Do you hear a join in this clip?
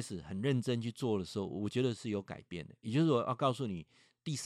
no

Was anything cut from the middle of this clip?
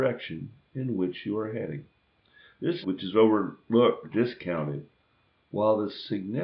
yes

